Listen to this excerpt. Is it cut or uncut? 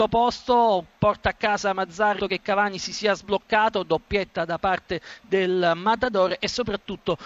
cut